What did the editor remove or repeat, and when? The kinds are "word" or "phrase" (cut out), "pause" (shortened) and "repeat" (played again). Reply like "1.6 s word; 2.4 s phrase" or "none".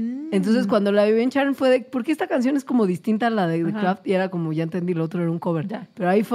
none